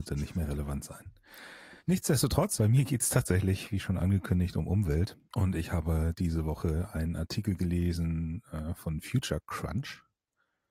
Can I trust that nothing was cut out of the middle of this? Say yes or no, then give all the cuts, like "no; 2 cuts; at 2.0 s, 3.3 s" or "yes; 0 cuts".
no; 2 cuts; at 1.8 s, 5.2 s